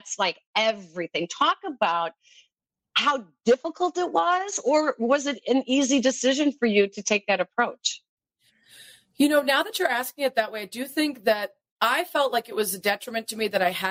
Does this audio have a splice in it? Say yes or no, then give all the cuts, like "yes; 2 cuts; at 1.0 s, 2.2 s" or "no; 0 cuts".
no; 0 cuts